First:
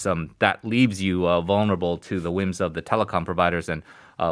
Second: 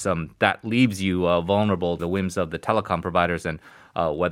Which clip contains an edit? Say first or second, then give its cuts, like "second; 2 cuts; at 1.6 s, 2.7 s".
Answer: second; 1 cut; at 2.0 s